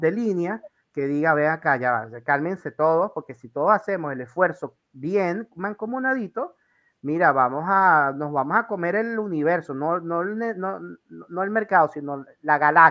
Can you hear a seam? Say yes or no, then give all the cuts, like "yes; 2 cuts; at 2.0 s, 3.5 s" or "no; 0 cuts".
no; 0 cuts